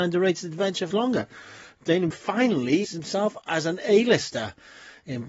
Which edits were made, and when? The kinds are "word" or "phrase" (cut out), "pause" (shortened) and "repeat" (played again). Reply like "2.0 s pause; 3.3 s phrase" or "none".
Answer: 0.9 s word; 2.1 s word; 2.8 s word